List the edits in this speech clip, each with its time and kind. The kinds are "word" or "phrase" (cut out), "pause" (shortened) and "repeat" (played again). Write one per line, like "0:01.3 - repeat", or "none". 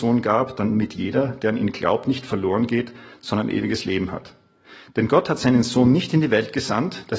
none

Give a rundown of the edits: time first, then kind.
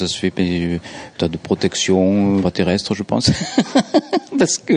0:01.2 - word
0:02.4 - phrase

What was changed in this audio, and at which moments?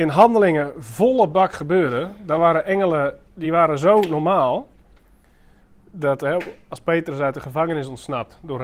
none

